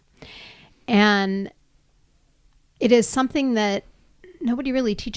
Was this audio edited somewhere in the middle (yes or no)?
no